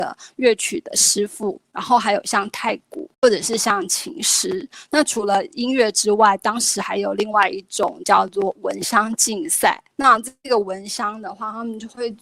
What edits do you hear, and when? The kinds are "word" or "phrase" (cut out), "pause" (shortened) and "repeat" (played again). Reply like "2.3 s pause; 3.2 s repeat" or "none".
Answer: 3.1 s pause; 9.9 s pause